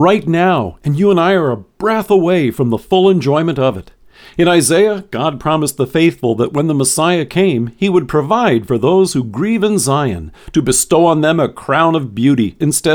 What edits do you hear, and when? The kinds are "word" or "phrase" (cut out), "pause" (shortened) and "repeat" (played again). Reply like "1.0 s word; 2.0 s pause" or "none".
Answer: none